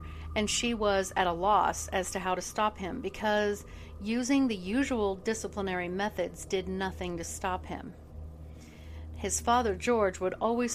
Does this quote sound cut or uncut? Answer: uncut